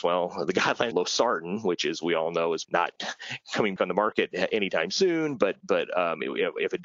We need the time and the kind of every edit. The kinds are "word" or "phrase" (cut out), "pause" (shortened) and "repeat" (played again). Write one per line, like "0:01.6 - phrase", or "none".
0:00.9 - word
0:02.6 - word
0:03.8 - word
0:05.6 - word

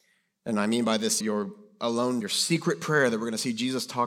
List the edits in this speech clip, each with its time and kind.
0:01.2 - word
0:02.2 - word

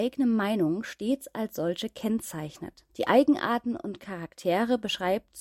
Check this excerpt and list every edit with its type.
0:02.9 - pause

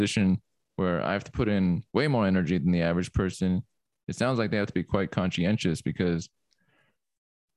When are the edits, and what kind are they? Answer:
0:01.9 - pause

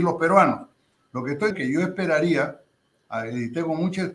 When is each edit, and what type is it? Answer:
0:01.5 - word

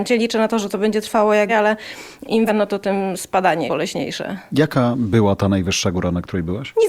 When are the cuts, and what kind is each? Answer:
0:01.5 - word
0:02.5 - phrase
0:03.7 - word

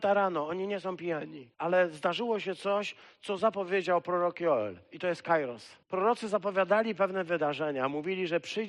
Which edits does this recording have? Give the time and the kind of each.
0:01.5 - pause
0:05.8 - pause

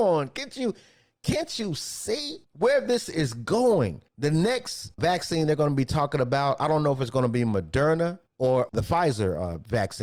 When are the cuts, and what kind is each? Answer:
0:02.4 - pause
0:04.1 - pause
0:04.9 - pause
0:08.3 - pause

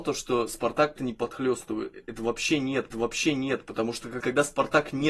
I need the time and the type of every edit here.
0:01.0 - phrase
0:02.9 - repeat
0:04.2 - word

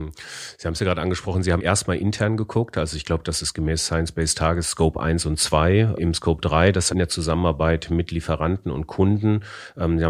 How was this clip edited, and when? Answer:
0:01.6 - word
0:06.0 - word
0:06.9 - word

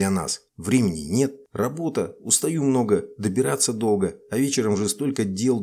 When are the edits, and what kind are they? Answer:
none

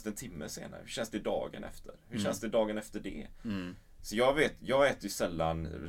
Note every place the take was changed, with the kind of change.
none

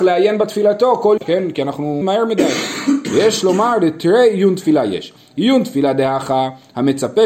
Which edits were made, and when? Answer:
0:01.2 - word
0:02.0 - word

